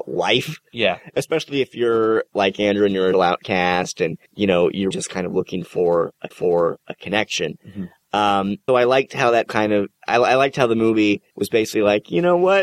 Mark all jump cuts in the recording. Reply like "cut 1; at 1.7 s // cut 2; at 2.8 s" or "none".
cut 1; at 3.1 s // cut 2; at 4.3 s // cut 3; at 4.9 s // cut 4; at 6.3 s // cut 5; at 8.7 s // cut 6; at 9.5 s // cut 7; at 11.3 s